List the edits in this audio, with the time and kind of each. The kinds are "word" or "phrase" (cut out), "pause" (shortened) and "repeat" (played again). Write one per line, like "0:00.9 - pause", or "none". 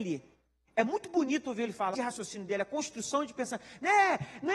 0:01.9 - phrase